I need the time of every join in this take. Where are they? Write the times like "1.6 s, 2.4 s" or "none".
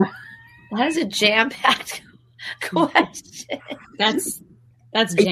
none

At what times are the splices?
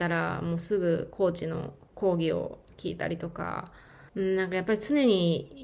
4.1 s

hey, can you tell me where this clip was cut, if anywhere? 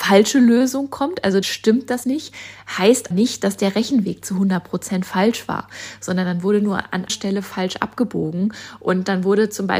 1.4 s, 2.0 s, 3.1 s, 7.1 s

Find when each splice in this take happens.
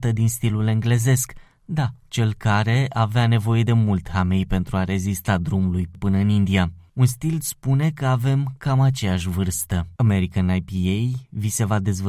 5.9 s, 7.4 s, 10.0 s

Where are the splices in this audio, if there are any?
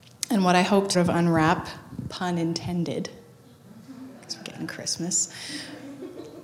0.9 s

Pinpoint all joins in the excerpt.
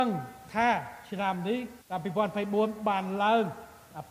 1.8 s

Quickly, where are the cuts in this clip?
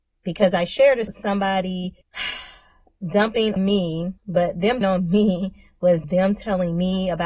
1.1 s, 2.0 s, 3.6 s, 4.2 s, 4.8 s, 6.0 s

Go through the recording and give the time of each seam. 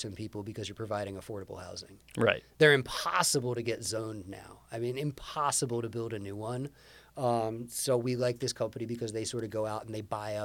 none

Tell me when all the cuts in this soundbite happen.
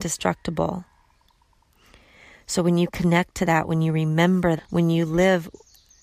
4.6 s

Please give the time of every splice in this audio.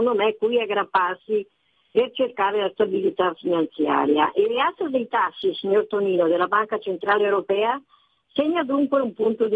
none

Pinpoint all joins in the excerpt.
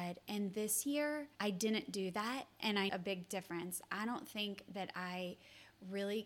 1.3 s, 2.9 s

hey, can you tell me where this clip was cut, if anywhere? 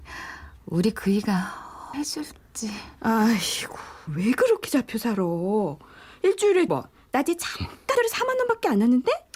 1.9 s, 4.1 s, 6.7 s, 8.0 s

